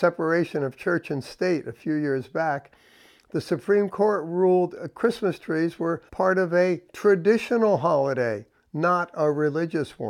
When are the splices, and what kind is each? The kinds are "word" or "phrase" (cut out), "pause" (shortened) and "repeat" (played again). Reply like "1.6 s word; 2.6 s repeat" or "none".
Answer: 6.1 s pause